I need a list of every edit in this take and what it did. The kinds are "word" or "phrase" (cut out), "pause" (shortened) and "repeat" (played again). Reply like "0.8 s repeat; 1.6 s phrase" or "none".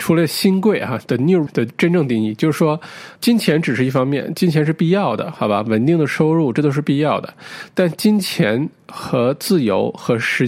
1.5 s word; 3.2 s word